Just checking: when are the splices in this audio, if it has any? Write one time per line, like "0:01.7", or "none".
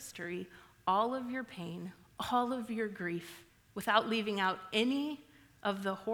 0:03.5